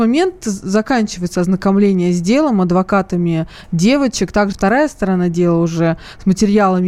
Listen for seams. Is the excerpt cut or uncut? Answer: cut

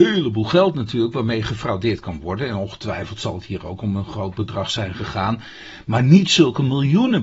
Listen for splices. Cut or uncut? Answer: uncut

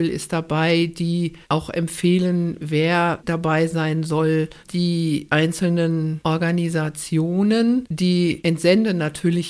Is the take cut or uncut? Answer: uncut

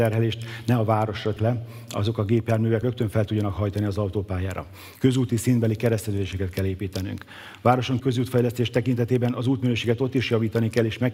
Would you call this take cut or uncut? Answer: cut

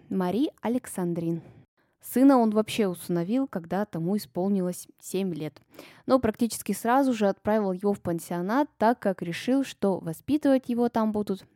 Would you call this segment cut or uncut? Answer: uncut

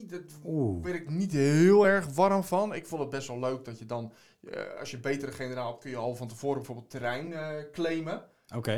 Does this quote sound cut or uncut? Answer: uncut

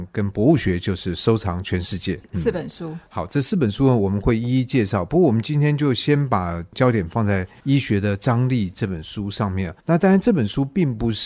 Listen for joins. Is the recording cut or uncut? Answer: cut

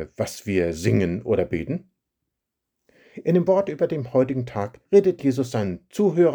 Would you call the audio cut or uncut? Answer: cut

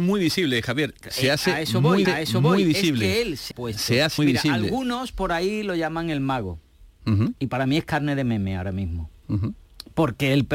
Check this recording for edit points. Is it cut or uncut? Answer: cut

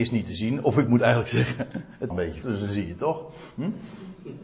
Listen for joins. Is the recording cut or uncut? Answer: cut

